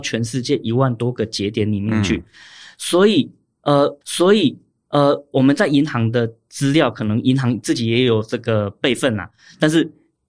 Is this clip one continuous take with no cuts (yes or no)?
no